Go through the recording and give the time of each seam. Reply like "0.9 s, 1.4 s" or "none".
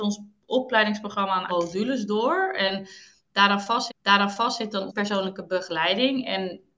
1.5 s, 3.9 s, 4.9 s